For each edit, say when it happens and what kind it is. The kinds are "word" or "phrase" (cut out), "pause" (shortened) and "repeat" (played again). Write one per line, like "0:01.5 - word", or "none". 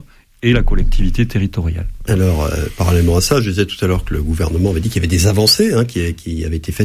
none